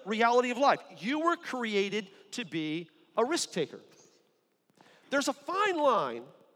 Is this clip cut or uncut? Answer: uncut